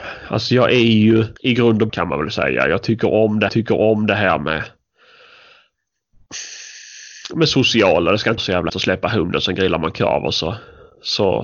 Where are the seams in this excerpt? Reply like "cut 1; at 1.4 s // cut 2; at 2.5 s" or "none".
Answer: cut 1; at 1.4 s // cut 2; at 1.9 s // cut 3; at 3.5 s // cut 4; at 8.4 s // cut 5; at 8.7 s